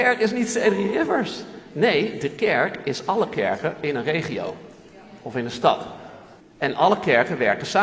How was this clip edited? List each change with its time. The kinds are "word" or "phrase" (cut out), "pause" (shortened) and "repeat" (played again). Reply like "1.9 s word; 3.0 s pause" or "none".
6.4 s pause